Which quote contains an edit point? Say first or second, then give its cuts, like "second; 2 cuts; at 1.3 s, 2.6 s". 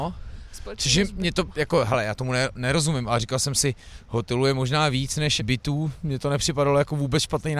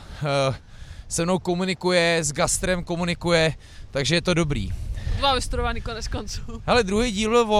first; 1 cut; at 5.4 s